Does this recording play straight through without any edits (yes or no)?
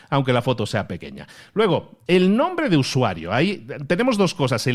yes